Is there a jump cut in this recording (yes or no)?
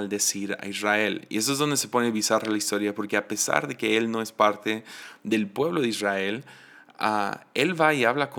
no